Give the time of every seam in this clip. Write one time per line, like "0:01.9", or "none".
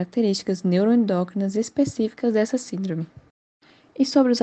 none